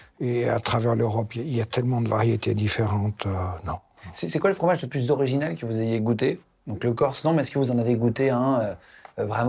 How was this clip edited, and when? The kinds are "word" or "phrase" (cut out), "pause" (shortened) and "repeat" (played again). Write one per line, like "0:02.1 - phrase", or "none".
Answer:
none